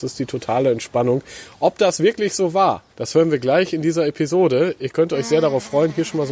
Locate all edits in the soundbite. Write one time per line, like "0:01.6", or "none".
0:02.9